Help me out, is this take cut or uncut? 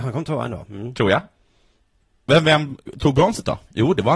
uncut